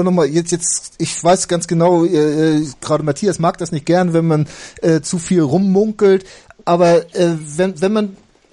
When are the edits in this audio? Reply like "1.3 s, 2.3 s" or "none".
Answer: none